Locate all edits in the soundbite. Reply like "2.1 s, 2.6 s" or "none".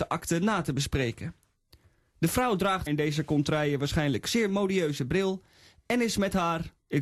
2.9 s